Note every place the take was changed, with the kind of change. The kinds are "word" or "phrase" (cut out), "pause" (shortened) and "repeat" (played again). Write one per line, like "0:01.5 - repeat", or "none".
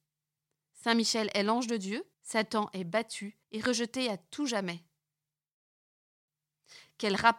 0:02.1 - pause
0:03.4 - pause